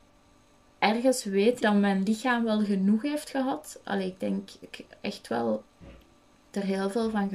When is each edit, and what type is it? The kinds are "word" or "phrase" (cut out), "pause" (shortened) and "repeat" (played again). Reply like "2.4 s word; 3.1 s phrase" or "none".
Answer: 1.6 s word; 4.7 s word